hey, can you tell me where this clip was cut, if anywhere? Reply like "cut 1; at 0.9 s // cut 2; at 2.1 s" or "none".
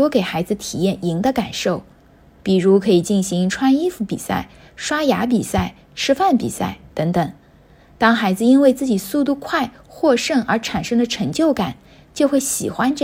none